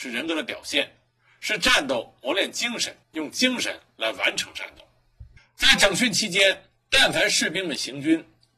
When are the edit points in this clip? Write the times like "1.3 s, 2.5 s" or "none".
3.0 s, 5.4 s, 6.8 s